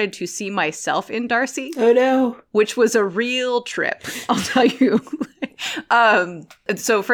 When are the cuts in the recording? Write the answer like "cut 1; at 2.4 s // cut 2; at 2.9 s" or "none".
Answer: none